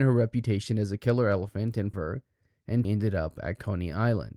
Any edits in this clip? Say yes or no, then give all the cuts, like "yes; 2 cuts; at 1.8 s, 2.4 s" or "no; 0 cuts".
yes; 2 cuts; at 1.9 s, 2.8 s